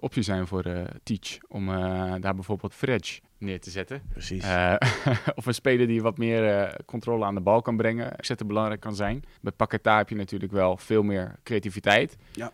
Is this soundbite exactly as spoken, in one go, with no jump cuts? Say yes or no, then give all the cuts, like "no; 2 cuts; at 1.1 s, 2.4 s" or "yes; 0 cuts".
no; 4 cuts; at 2.7 s, 3.3 s, 8.2 s, 9.4 s